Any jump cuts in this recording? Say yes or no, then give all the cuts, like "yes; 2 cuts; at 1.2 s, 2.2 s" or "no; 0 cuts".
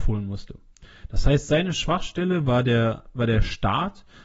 no; 0 cuts